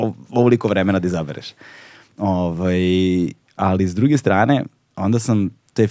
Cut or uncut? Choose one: uncut